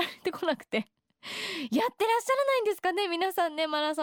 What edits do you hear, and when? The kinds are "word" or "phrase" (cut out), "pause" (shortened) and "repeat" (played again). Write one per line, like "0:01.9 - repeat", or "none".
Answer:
none